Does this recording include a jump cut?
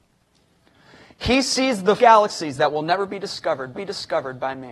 yes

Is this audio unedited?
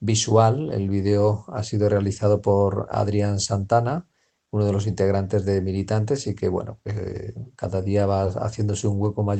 yes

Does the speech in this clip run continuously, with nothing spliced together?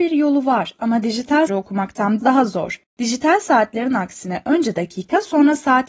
no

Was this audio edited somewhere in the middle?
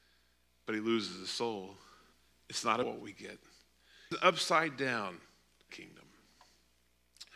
yes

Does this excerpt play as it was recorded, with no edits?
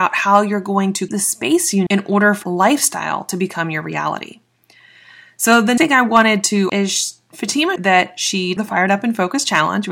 no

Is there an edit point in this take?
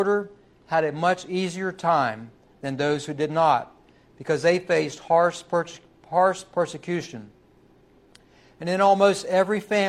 no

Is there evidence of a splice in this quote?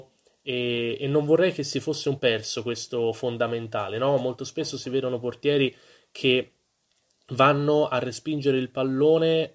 yes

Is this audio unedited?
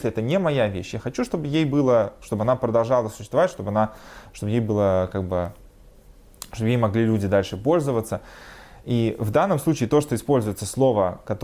yes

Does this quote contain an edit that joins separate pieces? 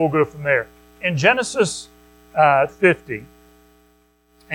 yes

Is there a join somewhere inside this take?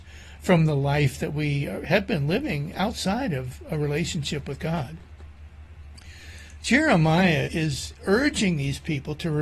yes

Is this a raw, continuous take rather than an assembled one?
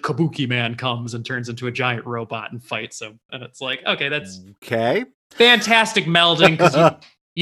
yes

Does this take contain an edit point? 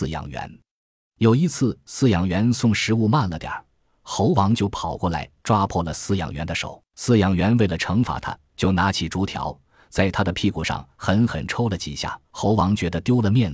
yes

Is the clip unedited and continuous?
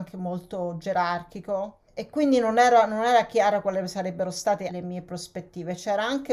no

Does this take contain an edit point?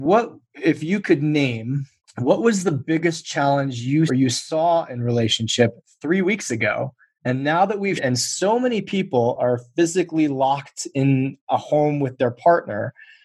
yes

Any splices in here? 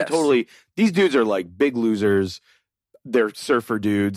no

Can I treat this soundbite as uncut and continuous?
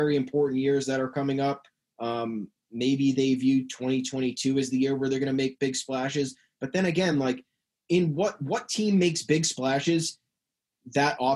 yes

